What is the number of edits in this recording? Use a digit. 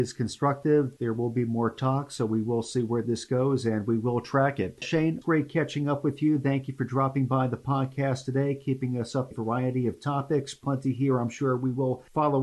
2